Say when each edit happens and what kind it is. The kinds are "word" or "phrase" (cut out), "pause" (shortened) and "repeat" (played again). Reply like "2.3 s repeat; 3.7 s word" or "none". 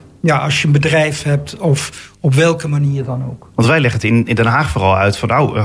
none